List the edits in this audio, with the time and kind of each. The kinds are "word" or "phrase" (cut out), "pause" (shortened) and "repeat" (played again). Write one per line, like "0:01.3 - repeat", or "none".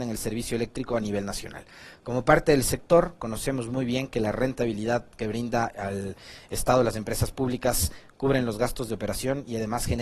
none